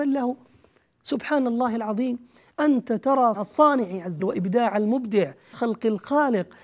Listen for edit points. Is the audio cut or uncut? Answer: cut